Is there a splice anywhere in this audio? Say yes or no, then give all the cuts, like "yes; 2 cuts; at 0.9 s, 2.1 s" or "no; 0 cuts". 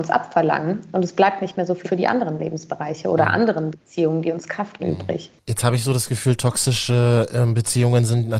yes; 2 cuts; at 1.8 s, 4.8 s